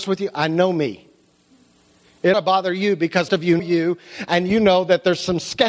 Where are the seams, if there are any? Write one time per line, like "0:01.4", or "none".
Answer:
0:02.3
0:03.3
0:03.6